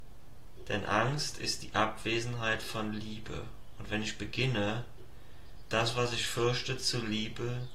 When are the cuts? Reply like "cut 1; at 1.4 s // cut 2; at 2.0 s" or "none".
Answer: none